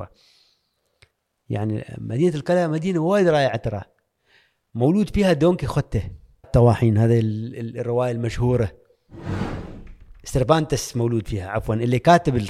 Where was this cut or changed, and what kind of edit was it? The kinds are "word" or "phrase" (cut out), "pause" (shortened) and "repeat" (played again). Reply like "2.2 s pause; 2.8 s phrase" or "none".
6.4 s word